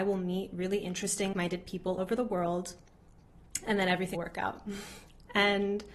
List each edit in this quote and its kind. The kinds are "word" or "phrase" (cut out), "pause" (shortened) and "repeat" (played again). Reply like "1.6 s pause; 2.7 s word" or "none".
1.3 s word; 2.0 s word; 4.1 s word